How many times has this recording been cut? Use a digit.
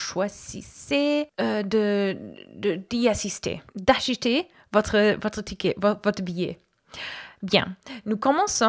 1